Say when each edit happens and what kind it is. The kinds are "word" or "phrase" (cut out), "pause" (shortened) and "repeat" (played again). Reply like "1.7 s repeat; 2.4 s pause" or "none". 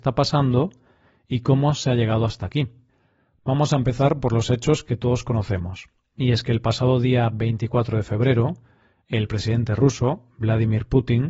none